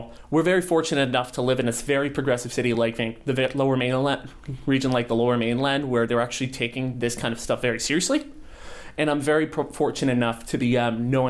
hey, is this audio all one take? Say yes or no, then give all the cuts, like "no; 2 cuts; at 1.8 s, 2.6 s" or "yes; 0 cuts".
yes; 0 cuts